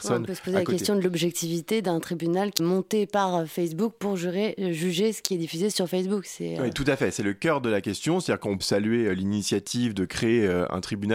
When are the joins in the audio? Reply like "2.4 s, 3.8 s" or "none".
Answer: 2.6 s, 8.6 s